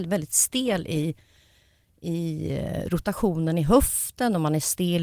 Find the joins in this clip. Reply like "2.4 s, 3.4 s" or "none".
none

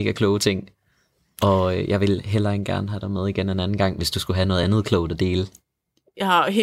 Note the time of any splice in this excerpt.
none

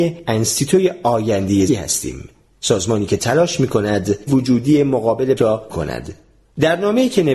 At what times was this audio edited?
1.7 s, 4.3 s, 5.4 s, 5.7 s

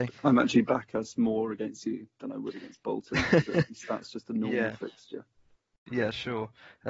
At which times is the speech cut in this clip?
none

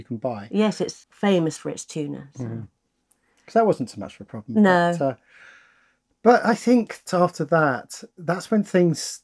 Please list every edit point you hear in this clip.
1.0 s, 7.1 s, 8.1 s

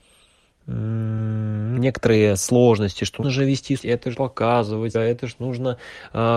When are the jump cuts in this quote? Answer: 1.8 s, 3.2 s, 3.8 s, 4.1 s, 4.9 s

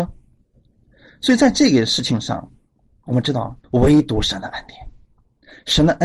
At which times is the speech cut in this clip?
3.6 s

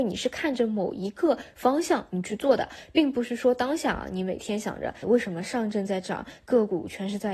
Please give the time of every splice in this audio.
5.0 s

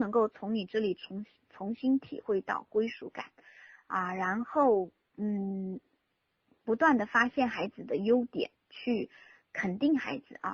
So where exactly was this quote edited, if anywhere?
none

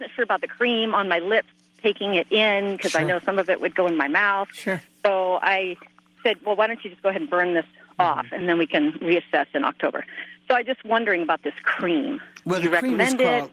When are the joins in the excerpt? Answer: none

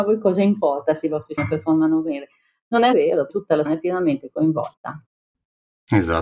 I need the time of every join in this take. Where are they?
1.4 s, 2.9 s, 3.3 s, 3.7 s

